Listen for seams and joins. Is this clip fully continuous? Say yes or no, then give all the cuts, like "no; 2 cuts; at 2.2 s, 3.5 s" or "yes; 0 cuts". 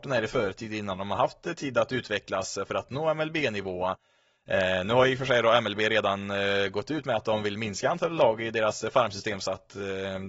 yes; 0 cuts